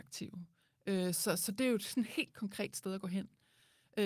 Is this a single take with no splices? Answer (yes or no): yes